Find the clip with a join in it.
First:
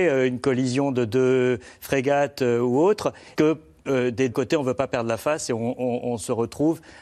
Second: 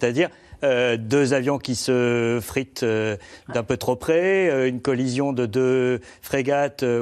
first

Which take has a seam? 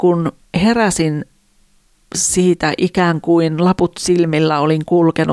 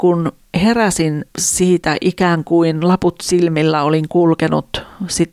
second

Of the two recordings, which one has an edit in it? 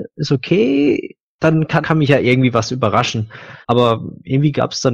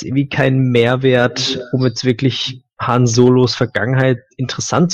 first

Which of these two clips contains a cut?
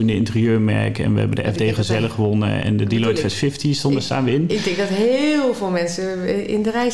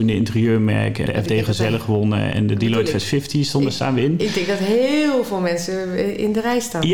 second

